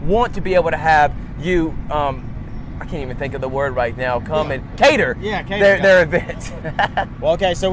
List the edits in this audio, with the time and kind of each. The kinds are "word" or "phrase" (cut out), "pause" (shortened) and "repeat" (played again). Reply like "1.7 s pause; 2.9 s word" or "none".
none